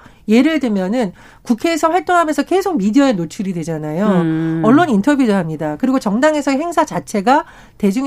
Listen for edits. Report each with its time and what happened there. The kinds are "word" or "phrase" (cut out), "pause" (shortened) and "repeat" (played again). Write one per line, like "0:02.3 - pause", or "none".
none